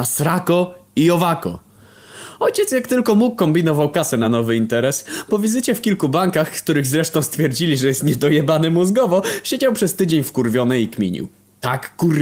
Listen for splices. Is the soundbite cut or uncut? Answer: uncut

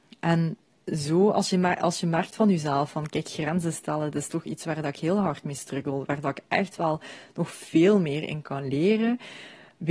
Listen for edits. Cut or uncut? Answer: uncut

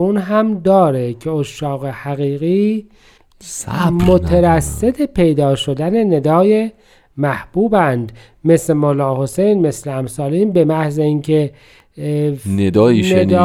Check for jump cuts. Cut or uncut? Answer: uncut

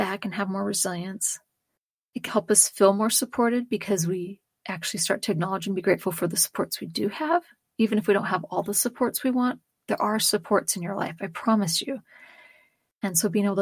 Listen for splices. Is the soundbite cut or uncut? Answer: cut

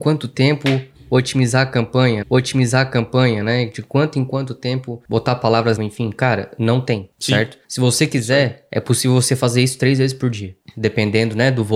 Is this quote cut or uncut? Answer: cut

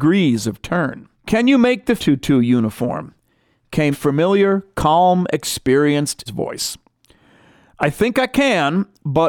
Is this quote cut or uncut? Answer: cut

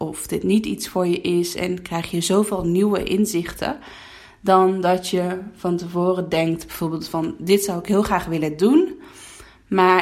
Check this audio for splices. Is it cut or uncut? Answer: uncut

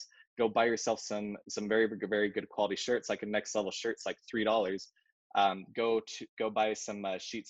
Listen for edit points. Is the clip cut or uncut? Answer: uncut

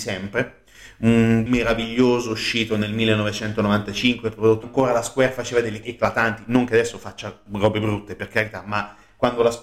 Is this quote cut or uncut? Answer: cut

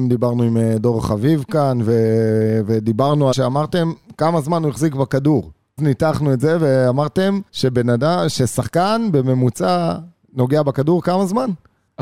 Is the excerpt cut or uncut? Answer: cut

